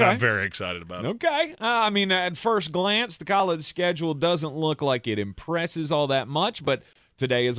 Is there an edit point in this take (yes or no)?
no